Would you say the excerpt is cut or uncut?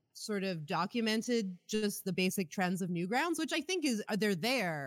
uncut